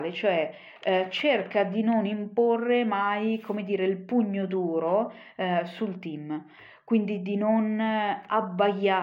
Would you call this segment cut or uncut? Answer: uncut